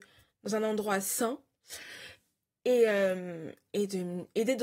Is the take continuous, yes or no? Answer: yes